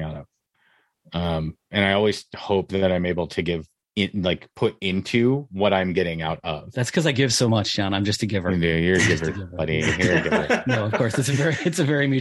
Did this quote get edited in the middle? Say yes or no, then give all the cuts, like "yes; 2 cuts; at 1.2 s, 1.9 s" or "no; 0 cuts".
no; 0 cuts